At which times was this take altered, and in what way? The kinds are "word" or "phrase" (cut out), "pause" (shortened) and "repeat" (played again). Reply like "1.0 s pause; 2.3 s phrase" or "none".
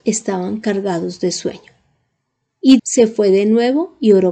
2.8 s word